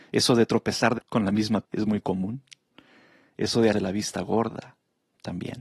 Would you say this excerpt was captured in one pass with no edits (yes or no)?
no